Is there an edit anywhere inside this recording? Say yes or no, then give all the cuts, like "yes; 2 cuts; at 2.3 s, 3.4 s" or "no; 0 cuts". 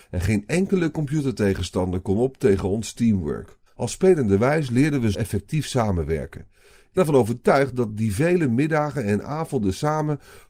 yes; 3 cuts; at 3.7 s, 5.1 s, 7.0 s